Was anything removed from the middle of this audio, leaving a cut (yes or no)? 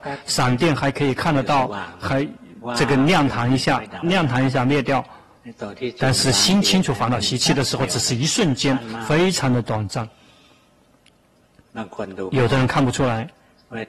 yes